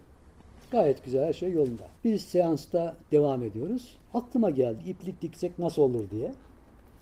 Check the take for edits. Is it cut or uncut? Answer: cut